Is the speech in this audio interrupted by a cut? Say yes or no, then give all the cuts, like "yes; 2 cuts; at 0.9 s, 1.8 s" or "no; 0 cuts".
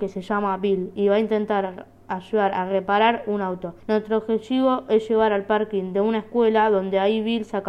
yes; 1 cut; at 3.8 s